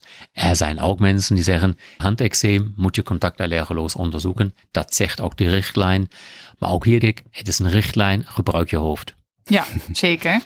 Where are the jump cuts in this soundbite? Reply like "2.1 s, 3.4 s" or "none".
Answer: 2.0 s, 7.0 s